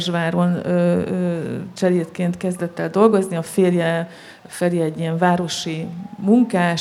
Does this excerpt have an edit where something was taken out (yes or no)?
no